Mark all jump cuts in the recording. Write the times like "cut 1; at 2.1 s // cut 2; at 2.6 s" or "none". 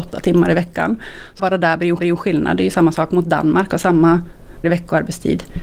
cut 1; at 1.4 s // cut 2; at 2.0 s // cut 3; at 4.6 s